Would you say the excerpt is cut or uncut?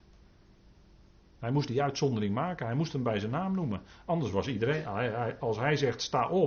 uncut